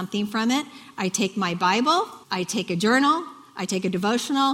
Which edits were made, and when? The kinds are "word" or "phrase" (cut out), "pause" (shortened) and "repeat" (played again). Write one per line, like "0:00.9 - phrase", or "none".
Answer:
0:02.2 - pause